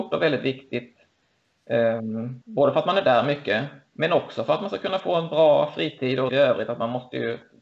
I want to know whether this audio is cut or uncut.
cut